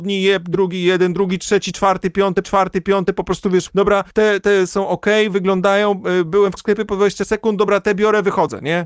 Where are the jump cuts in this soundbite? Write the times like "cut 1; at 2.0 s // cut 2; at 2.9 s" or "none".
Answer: cut 1; at 2.4 s // cut 2; at 3.7 s // cut 3; at 4.1 s // cut 4; at 6.6 s